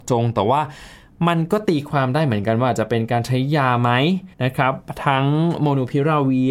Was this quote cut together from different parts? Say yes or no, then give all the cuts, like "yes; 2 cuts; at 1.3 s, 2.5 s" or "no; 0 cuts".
yes; 1 cut; at 4.3 s